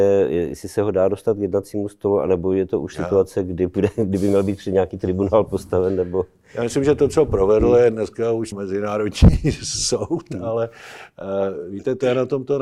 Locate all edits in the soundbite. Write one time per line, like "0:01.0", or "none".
0:08.5